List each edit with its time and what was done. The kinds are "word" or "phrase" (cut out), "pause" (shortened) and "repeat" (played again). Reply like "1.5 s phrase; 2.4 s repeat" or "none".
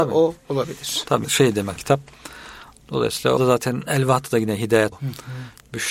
1.2 s word; 1.8 s word; 3.4 s word; 4.9 s word